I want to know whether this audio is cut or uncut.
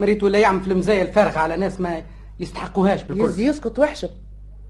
uncut